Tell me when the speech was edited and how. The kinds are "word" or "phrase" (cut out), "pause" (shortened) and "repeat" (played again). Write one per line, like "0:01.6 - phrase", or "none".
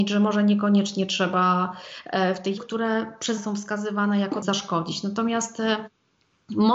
0:02.6 - phrase
0:03.4 - word
0:04.4 - phrase